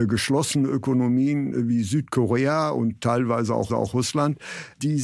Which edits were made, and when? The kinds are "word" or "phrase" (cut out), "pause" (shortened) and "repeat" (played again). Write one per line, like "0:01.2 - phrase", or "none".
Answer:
0:03.7 - repeat